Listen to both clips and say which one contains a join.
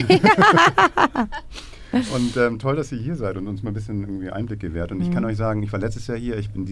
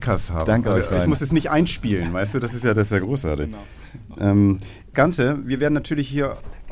second; 1 cut; at 4.9 s

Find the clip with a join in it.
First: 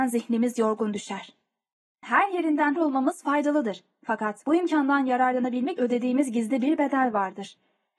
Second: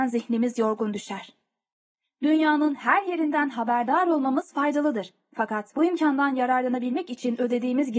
first; 3 cuts; at 2.0 s, 2.8 s, 5.8 s

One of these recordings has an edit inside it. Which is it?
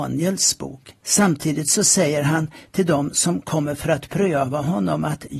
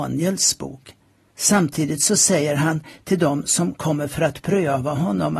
first; 1 cut; at 1.0 s

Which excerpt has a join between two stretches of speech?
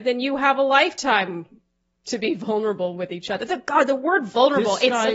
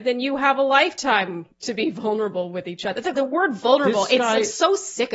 second; 2 cuts; at 1.5 s, 3.2 s

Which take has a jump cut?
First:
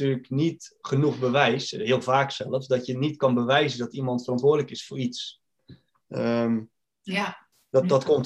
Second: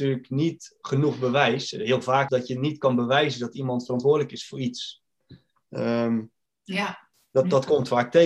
second; 1 cut; at 2.3 s

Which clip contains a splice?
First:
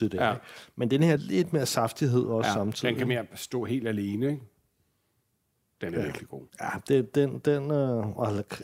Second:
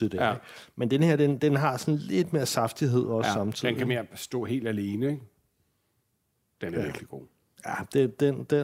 first; 2 cuts; at 1.2 s, 6.5 s

